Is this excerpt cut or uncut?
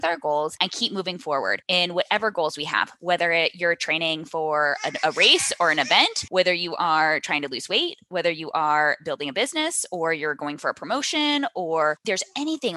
uncut